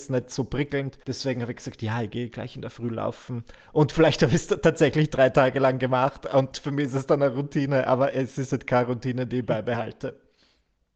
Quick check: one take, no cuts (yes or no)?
no